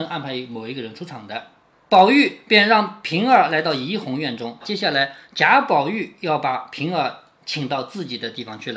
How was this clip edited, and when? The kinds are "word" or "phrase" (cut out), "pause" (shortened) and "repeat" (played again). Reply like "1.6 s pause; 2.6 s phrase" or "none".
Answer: 4.6 s word